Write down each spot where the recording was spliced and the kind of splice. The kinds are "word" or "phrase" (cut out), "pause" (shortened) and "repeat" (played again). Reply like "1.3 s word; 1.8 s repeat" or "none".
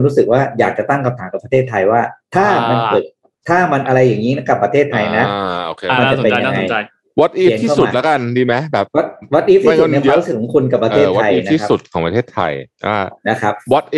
none